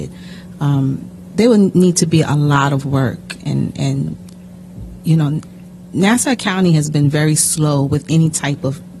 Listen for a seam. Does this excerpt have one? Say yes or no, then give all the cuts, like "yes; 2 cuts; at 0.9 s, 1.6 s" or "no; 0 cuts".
no; 0 cuts